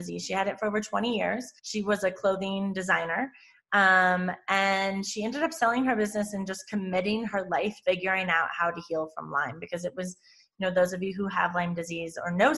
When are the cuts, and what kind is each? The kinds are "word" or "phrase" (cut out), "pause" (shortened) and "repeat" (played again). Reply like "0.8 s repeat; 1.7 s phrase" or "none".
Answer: 1.6 s pause; 7.8 s word